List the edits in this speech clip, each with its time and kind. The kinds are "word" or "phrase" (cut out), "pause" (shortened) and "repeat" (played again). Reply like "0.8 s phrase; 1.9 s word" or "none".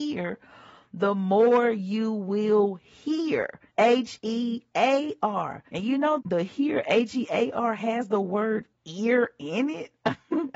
3.7 s pause; 5.7 s pause; 6.2 s word

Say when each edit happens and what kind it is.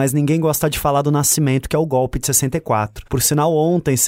3.1 s pause

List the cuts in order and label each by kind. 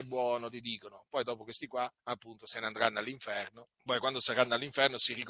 2.0 s pause; 3.8 s pause

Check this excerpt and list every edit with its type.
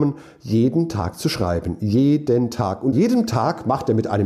2.9 s word

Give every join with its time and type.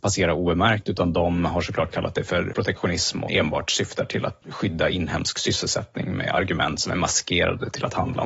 2.5 s word; 3.3 s word; 4.4 s word

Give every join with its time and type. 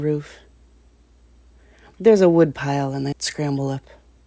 3.1 s word

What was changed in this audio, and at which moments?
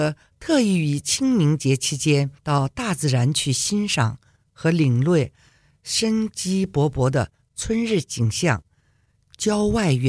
2.4 s pause

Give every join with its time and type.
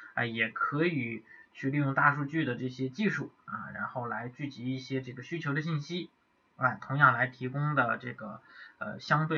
none

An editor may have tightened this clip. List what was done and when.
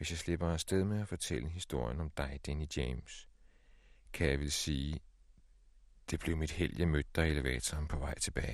none

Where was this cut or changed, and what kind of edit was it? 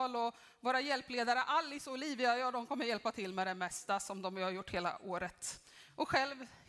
none

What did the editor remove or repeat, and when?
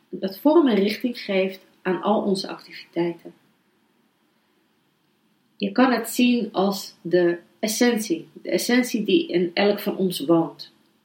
none

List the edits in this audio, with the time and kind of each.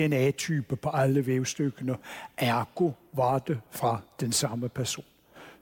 none

